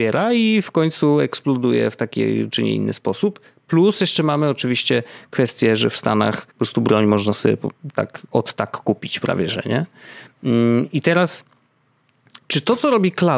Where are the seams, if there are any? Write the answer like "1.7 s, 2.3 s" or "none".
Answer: 6.5 s